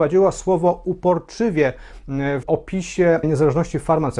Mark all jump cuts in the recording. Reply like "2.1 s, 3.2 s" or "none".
2.4 s, 3.2 s

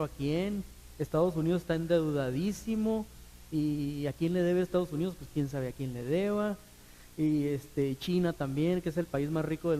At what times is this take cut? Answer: none

